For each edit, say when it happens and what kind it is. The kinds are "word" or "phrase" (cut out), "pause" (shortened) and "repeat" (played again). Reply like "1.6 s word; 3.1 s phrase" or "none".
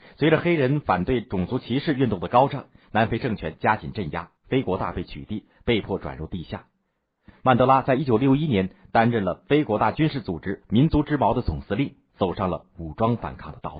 4.4 s pause